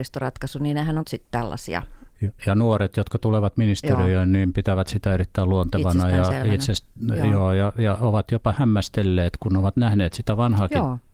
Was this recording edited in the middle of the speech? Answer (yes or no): yes